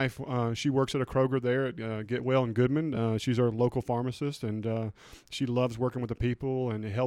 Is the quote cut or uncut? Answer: uncut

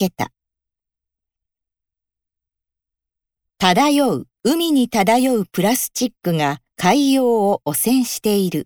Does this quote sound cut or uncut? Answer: cut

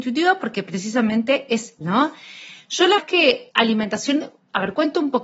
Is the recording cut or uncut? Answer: cut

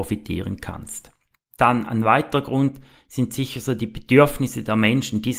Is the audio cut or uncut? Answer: uncut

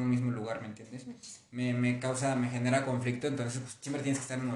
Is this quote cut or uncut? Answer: uncut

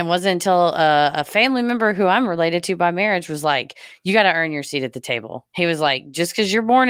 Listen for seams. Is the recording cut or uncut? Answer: cut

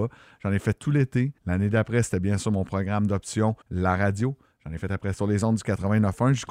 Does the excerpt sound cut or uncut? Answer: cut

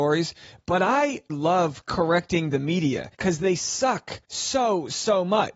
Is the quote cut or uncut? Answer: cut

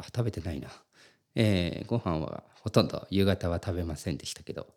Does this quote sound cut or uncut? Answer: uncut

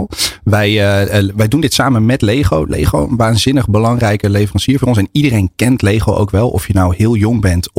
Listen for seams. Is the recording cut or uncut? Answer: uncut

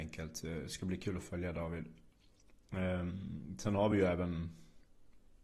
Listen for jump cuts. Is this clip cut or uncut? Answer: uncut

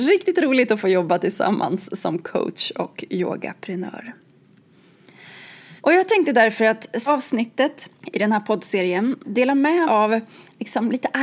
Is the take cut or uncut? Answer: cut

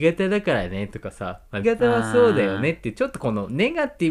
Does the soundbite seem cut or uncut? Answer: cut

